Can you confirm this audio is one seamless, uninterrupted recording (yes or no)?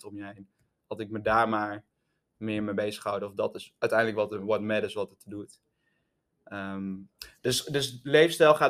yes